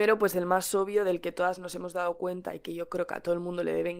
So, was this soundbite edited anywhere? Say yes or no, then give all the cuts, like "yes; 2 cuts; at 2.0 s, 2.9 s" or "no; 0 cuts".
no; 0 cuts